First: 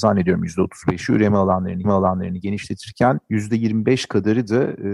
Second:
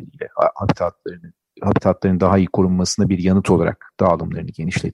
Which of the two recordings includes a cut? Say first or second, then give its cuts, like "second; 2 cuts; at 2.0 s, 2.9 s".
first; 1 cut; at 1.8 s